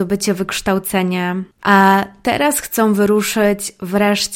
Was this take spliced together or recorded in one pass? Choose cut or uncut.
uncut